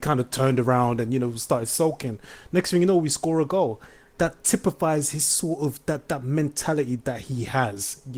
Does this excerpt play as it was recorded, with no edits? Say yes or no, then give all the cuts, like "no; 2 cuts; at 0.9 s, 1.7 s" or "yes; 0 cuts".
yes; 0 cuts